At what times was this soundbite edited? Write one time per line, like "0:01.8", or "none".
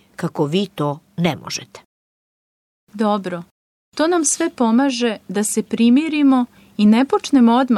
none